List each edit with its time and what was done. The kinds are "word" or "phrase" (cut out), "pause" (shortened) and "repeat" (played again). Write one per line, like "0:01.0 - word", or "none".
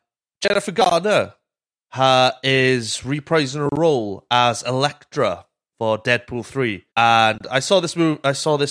0:06.9 - pause